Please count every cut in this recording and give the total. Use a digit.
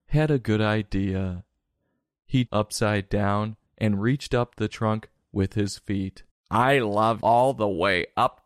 5